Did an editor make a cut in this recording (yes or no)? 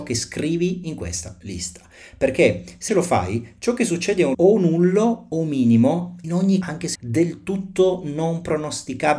yes